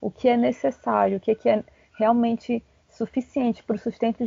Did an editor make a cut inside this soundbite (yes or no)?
no